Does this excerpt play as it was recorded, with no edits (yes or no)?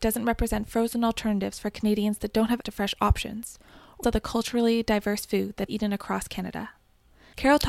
no